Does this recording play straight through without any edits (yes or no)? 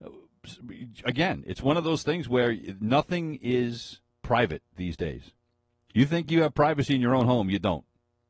yes